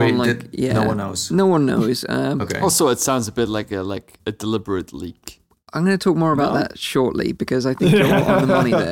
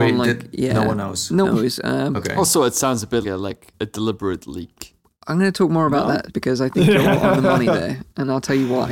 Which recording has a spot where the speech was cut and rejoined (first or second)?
second